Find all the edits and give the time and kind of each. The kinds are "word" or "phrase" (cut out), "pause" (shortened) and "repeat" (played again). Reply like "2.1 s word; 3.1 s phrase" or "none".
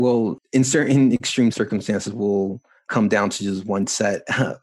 none